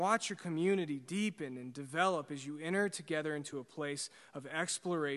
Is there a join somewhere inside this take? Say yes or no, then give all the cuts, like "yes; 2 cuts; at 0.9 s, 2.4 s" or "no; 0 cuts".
no; 0 cuts